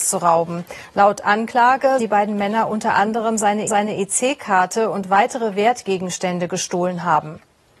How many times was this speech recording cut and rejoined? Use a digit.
2